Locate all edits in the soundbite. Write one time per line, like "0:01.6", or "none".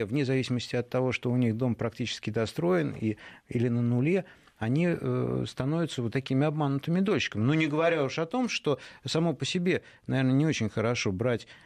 none